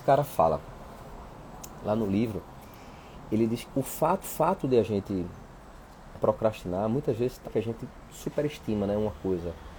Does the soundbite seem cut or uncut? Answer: cut